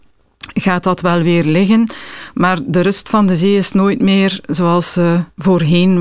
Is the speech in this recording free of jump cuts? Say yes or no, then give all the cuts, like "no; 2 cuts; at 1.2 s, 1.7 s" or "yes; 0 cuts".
yes; 0 cuts